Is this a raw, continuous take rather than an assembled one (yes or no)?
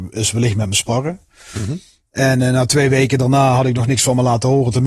yes